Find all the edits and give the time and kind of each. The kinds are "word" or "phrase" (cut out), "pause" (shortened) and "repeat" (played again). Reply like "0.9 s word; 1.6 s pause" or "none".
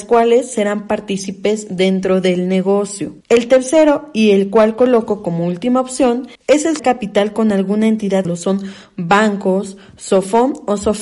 3.2 s pause; 6.3 s pause; 6.8 s word; 8.2 s phrase